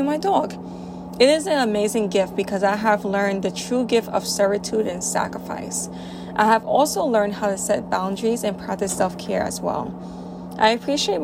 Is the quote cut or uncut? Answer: uncut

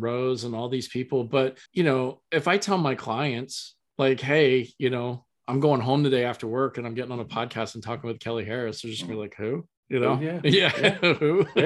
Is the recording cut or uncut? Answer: cut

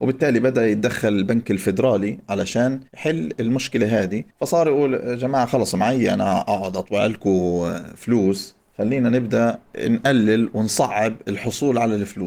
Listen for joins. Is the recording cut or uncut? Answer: cut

